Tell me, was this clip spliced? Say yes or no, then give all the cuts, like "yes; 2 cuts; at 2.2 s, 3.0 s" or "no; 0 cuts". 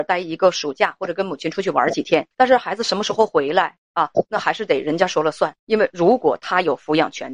yes; 2 cuts; at 2.3 s, 5.6 s